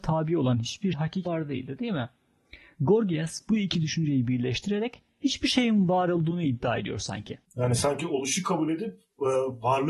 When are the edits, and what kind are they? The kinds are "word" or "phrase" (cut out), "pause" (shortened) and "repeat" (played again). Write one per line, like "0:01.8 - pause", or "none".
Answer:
0:00.9 - word
0:01.3 - word
0:07.5 - pause